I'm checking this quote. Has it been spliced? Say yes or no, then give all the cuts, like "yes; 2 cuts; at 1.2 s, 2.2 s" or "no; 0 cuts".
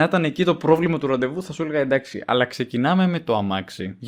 no; 0 cuts